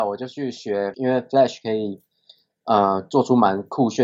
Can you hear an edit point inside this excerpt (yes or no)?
yes